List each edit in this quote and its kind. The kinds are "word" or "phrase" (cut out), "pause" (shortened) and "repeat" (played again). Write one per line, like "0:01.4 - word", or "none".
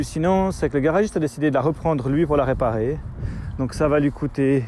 none

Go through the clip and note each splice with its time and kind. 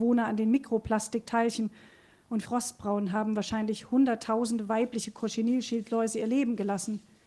0:02.5 - phrase

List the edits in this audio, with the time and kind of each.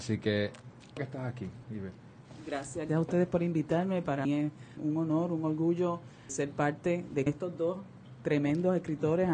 0:01.0 - word
0:02.9 - word
0:04.2 - word
0:04.8 - word
0:06.3 - word
0:07.3 - word

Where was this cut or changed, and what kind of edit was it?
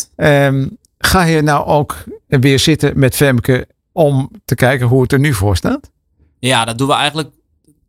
none

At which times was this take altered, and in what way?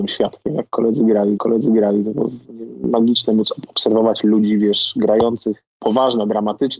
0:01.4 - repeat
0:05.7 - pause

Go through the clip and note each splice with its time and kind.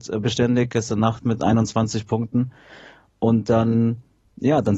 none

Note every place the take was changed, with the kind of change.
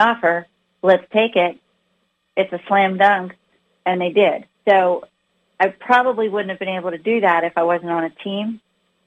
0:04.5 - pause

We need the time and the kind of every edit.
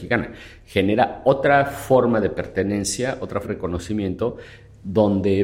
0:03.4 - phrase

